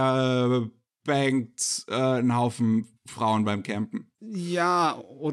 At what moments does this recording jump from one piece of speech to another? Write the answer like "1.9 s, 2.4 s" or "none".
3.0 s, 4.1 s